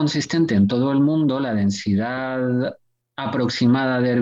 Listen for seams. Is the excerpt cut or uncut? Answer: uncut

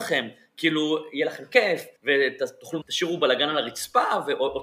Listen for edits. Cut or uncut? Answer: cut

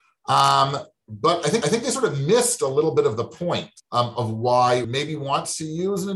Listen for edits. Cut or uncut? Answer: cut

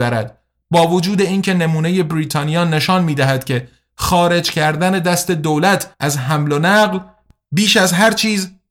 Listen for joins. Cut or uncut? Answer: cut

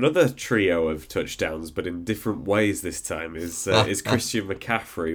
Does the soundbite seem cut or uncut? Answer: uncut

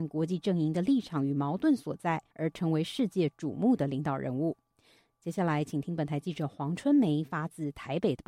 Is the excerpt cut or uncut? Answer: cut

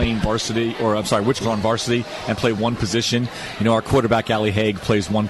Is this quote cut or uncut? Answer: cut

